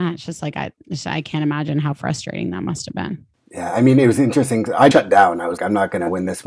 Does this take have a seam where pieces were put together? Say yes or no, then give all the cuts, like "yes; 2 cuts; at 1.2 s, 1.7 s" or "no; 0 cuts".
yes; 2 cuts; at 4.9 s, 5.6 s